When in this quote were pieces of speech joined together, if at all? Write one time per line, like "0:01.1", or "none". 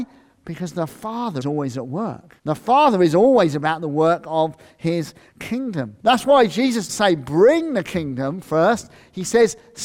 0:01.4
0:02.4
0:06.0
0:06.9